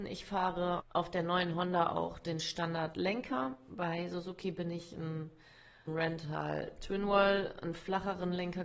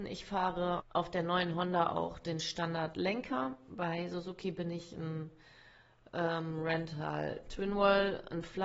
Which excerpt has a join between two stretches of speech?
first; 1 cut; at 5.9 s

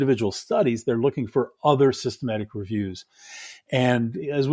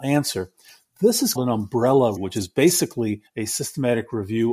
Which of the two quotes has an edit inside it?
second; 3 cuts; at 1.4 s, 2.2 s, 3.3 s

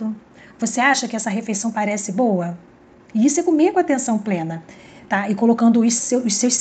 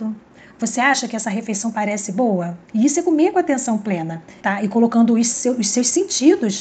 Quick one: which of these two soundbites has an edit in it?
second; 2 cuts; at 2.6 s, 4.4 s

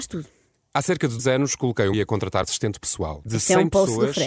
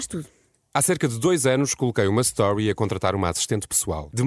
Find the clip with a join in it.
first; 4 cuts; at 1.2 s, 1.9 s, 2.4 s, 3.3 s

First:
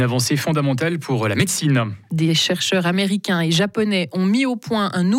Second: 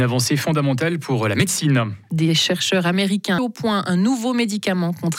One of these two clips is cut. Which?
second; 1 cut; at 3.4 s

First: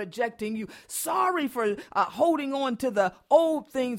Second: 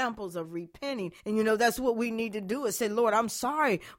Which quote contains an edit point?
second; 1 cut; at 1.2 s

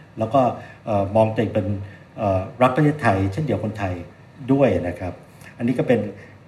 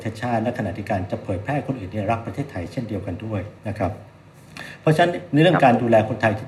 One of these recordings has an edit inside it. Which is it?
second; 1 cut; at 3.6 s

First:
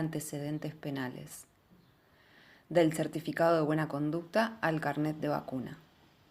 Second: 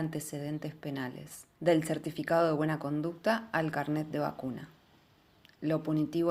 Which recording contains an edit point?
second; 1 cut; at 1.5 s

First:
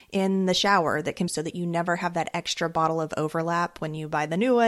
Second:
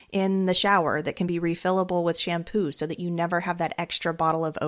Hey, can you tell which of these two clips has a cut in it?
first; 1 cut; at 1.3 s

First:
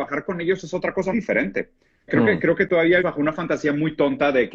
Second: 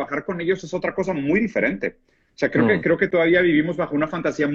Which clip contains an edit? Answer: first; 3 cuts; at 1.1 s, 2.1 s, 3.0 s

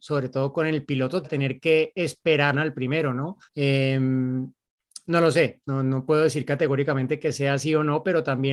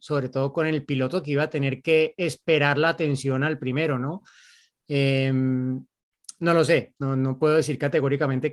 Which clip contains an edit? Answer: first; 3 cuts; at 1.2 s, 2.5 s, 3.5 s

